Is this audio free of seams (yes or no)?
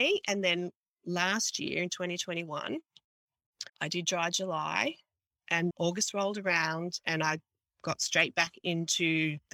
no